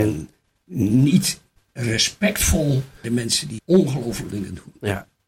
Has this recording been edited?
yes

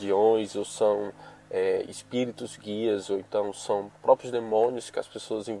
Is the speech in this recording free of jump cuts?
yes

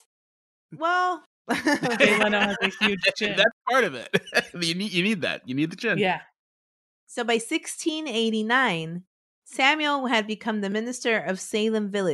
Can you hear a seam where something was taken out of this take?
no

